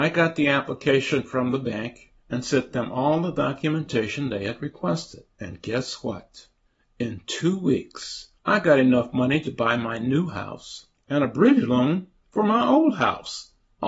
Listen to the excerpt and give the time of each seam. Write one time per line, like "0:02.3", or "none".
0:02.2
0:05.3
0:06.6
0:08.3
0:10.9